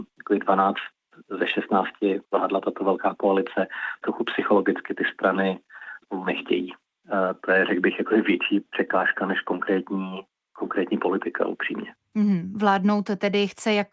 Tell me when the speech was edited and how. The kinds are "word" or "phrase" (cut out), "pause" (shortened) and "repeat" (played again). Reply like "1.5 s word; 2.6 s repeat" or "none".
2.2 s phrase; 4.0 s phrase; 6.0 s word